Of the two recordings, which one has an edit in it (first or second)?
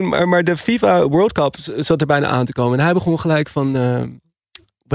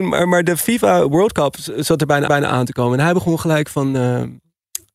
second